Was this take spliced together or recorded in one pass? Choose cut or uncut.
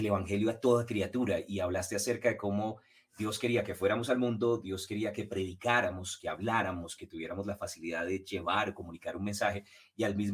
uncut